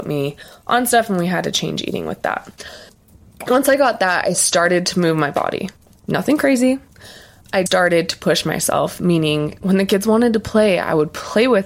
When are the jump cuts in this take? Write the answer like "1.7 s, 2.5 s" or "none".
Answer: 7.7 s

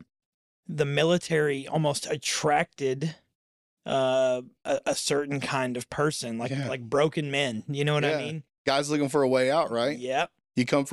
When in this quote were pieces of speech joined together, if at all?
none

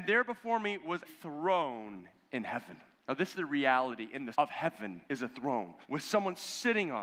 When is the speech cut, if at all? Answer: 1.1 s, 2.9 s, 3.3 s, 4.3 s, 5.0 s, 5.8 s

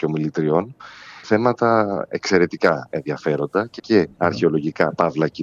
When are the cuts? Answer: 1.2 s, 3.8 s, 4.1 s

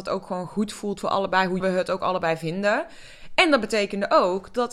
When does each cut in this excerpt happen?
1.6 s

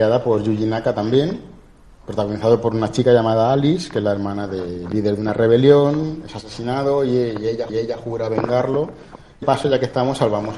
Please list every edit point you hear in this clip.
7.7 s, 9.4 s

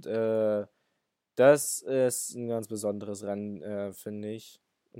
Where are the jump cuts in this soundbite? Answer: none

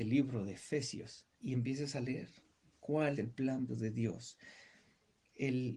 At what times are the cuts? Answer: 1.3 s, 3.2 s, 3.7 s

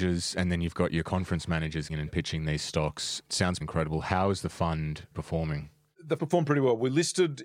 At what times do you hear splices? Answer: 1.9 s, 3.6 s, 5.1 s, 6.2 s

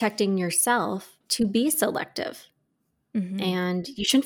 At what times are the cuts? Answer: 1.2 s

